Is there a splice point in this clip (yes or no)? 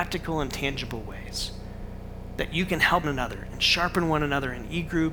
yes